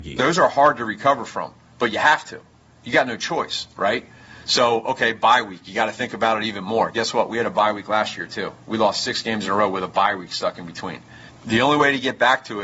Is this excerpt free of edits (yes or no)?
yes